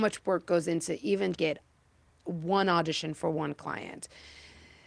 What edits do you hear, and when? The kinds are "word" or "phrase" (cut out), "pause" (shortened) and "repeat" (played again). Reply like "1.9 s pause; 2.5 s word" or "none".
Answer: 1.3 s phrase